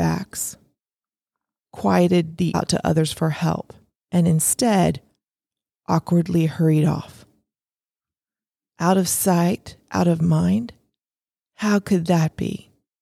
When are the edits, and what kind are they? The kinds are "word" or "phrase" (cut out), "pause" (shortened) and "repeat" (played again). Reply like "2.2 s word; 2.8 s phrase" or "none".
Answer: 2.5 s phrase; 3.9 s pause